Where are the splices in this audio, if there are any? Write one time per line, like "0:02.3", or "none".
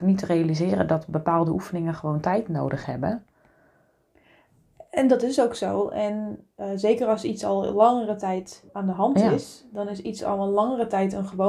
0:08.7